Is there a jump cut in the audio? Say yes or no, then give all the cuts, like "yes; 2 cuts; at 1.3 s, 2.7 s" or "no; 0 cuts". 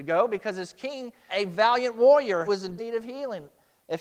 yes; 3 cuts; at 1.3 s, 2.5 s, 2.8 s